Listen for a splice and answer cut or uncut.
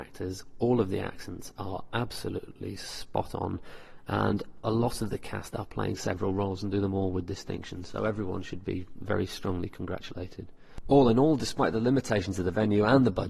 uncut